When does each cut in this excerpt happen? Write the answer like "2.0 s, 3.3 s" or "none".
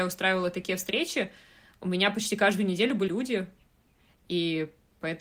3.1 s